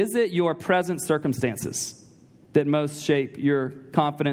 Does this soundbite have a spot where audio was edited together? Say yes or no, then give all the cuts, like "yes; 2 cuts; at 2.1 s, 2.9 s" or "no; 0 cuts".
no; 0 cuts